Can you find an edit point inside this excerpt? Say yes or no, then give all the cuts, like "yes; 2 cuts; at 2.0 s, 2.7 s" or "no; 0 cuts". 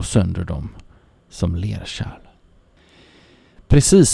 no; 0 cuts